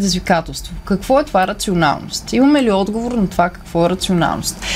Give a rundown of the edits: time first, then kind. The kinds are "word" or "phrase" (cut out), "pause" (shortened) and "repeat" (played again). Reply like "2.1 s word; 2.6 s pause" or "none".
none